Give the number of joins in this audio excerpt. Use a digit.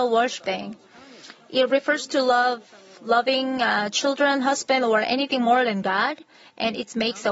0